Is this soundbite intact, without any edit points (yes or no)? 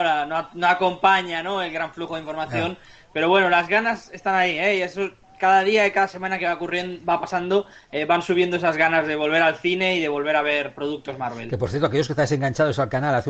yes